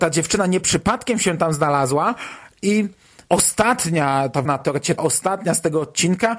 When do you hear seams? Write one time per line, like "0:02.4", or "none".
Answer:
0:04.4
0:05.0

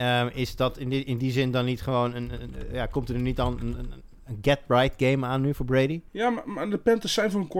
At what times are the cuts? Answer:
none

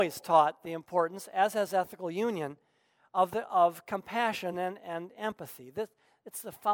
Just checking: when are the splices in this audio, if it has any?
none

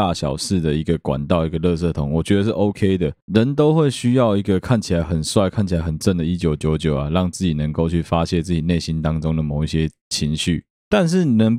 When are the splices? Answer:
none

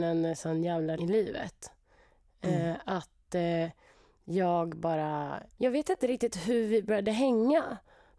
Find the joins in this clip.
0:01.0
0:05.6

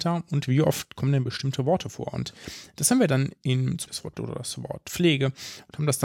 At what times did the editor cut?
0:03.9
0:04.2

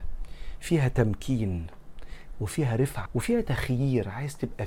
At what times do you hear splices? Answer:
0:03.1

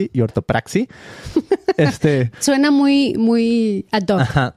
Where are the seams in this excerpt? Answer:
0:02.4

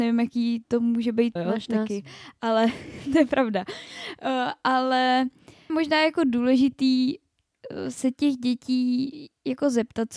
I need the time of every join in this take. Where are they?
0:01.4
0:05.7

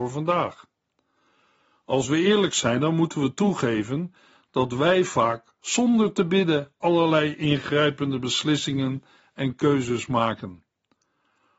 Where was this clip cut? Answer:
none

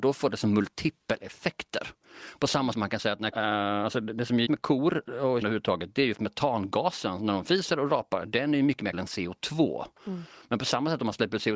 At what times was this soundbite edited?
0:02.7
0:03.3
0:04.5
0:05.4
0:06.1
0:08.9

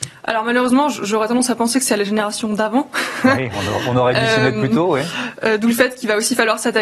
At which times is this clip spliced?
none

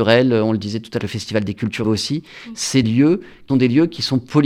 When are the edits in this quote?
0:01.0
0:01.8
0:02.8
0:03.5

